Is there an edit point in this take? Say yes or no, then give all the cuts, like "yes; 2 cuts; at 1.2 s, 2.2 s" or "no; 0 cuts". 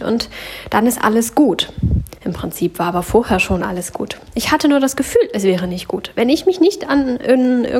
yes; 1 cut; at 2.2 s